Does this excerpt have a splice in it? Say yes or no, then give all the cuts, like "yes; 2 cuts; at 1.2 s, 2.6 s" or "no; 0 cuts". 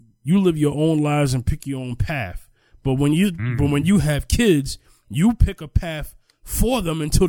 no; 0 cuts